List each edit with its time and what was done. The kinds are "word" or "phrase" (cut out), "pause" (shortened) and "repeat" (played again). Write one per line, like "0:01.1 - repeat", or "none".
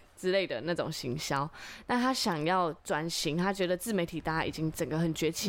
0:02.8 - pause